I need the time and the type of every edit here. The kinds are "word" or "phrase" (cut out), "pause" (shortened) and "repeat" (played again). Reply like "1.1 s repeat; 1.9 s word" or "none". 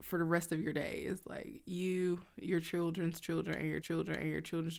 3.8 s repeat